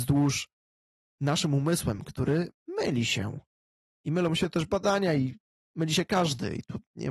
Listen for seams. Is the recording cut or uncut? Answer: uncut